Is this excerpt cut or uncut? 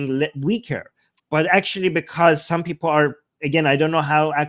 uncut